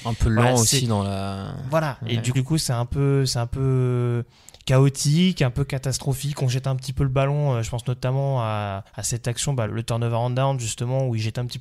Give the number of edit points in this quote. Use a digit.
3